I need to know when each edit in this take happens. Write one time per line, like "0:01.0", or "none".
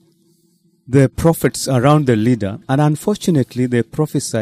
0:02.6